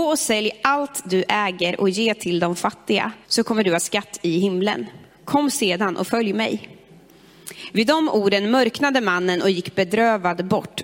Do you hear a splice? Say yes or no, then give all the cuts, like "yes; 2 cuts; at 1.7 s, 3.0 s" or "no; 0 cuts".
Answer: yes; 2 cuts; at 3.2 s, 3.8 s